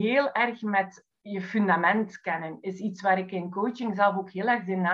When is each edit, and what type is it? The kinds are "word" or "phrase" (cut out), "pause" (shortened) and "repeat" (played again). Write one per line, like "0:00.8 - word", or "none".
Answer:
none